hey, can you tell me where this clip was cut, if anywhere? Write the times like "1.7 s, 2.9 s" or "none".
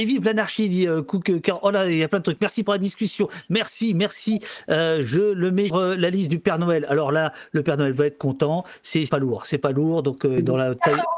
5.7 s, 9.1 s